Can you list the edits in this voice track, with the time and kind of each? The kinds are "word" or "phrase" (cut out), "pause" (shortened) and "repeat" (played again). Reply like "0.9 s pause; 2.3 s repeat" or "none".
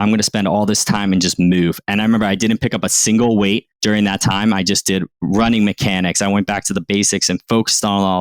3.7 s pause; 5.1 s pause

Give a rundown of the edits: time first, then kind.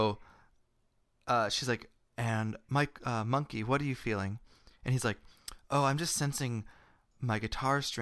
none

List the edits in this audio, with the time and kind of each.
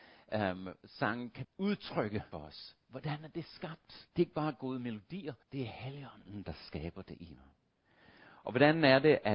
1.4 s word; 2.3 s phrase; 4.1 s pause; 5.4 s pause

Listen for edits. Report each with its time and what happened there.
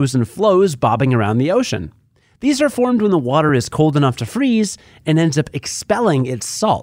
none

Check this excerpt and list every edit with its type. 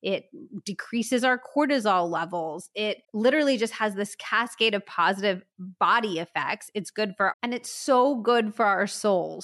3.0 s pause; 7.3 s phrase

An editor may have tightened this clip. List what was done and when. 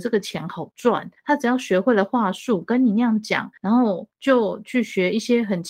1.2 s pause; 3.6 s pause; 4.1 s pause

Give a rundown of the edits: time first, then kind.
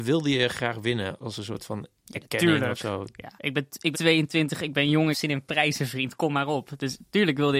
1.2 s word; 3.4 s pause; 3.9 s word; 5.1 s phrase

